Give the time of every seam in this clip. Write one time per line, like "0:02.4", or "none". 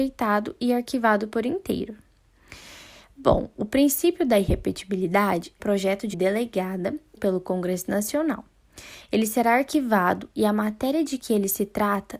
0:05.6
0:06.1
0:07.2